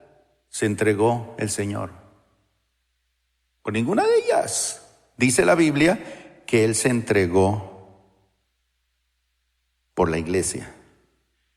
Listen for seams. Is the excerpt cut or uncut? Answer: uncut